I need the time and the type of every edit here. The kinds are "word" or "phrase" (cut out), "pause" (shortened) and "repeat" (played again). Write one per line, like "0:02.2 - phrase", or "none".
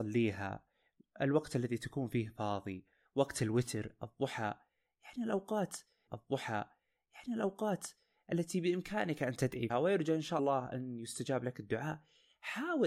0:06.1 - repeat
0:09.7 - word
0:10.4 - word